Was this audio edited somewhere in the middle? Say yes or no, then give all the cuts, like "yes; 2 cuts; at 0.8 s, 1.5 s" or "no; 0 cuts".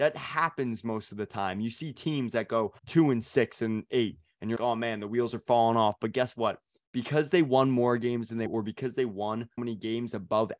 yes; 4 cuts; at 2.8 s, 4.6 s, 8.5 s, 9.6 s